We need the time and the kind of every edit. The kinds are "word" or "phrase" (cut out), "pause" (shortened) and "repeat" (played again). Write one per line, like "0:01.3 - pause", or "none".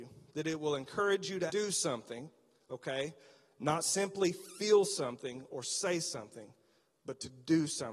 0:01.5 - word